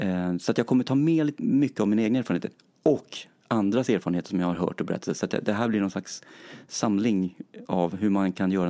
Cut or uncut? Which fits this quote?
uncut